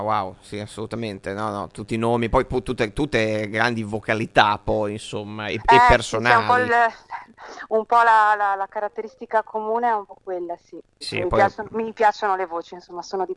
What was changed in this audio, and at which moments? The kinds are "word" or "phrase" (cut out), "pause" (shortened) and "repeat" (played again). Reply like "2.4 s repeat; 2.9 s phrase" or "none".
11.0 s word